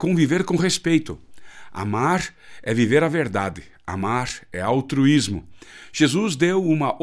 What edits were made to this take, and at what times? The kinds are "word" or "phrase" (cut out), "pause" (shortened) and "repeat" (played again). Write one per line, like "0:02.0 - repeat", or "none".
none